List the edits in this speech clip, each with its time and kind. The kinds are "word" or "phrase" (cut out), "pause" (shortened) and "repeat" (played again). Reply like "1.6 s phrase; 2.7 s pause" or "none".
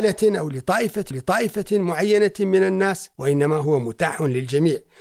1.1 s repeat; 3.1 s pause